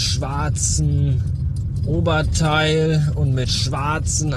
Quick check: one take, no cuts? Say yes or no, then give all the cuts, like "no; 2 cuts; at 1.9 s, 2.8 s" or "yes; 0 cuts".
yes; 0 cuts